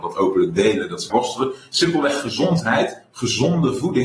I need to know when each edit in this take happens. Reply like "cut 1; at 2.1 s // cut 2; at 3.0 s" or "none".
cut 1; at 1.1 s